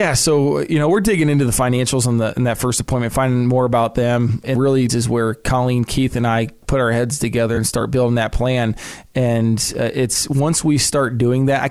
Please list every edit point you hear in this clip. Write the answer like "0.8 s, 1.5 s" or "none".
4.5 s, 4.9 s